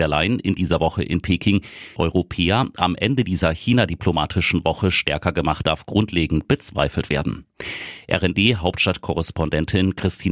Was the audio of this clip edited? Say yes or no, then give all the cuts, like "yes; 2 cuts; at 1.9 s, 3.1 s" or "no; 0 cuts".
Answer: yes; 2 cuts; at 2.0 s, 5.6 s